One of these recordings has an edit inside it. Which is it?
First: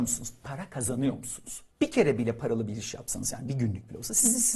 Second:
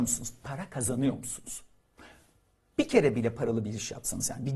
first; 1 cut; at 1.7 s

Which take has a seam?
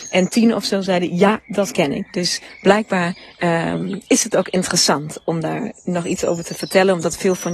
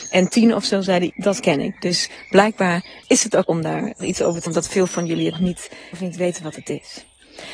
second; 7 cuts; at 1.1 s, 3.0 s, 3.4 s, 4.0 s, 4.5 s, 5.3 s, 5.9 s

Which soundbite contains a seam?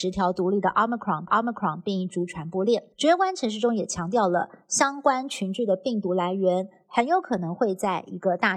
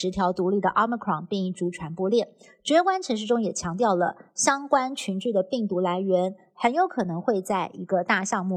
first; 2 cuts; at 1.3 s, 2.9 s

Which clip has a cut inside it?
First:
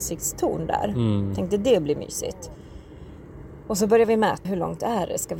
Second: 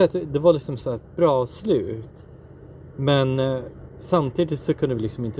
first; 1 cut; at 4.4 s

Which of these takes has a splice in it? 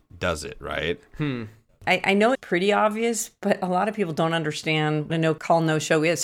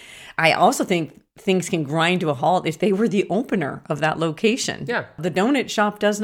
first; 2 cuts; at 2.3 s, 5.1 s

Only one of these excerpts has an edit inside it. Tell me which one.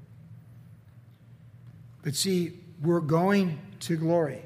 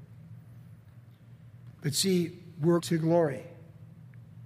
second; 2 cuts; at 1.7 s, 2.8 s

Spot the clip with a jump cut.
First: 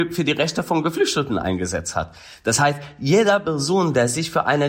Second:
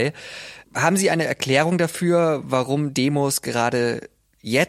second; 1 cut; at 2.9 s

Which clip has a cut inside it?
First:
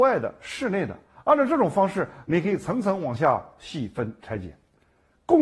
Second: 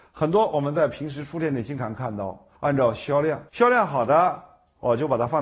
second; 2 cuts; at 2.6 s, 3.5 s

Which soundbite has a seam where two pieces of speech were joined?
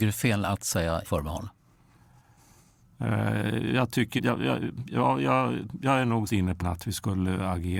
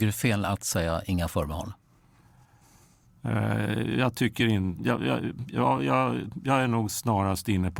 first; 4 cuts; at 1.0 s, 4.2 s, 6.3 s, 6.6 s

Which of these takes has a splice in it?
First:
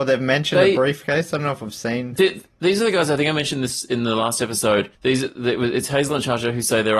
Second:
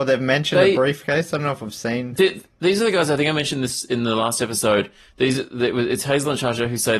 first; 1 cut; at 4.9 s

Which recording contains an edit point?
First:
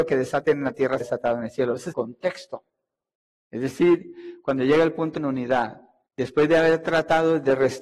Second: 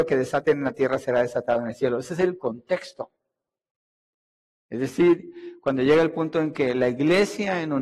first; 5 cuts; at 1.0 s, 1.9 s, 3.2 s, 5.2 s, 6.1 s

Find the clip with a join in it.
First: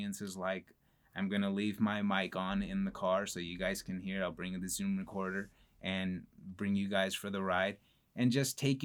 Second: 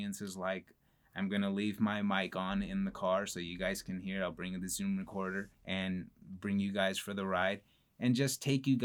second; 1 cut; at 5.5 s

